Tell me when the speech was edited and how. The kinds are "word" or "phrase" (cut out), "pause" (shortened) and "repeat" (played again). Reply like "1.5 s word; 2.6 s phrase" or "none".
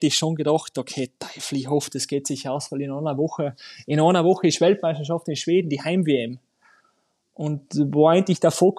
none